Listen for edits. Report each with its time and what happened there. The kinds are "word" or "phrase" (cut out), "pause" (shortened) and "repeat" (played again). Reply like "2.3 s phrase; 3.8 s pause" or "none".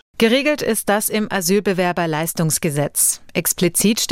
none